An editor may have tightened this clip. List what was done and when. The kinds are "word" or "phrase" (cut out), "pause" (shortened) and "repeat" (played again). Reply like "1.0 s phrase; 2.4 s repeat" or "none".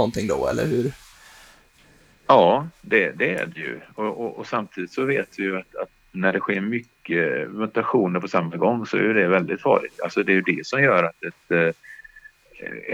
none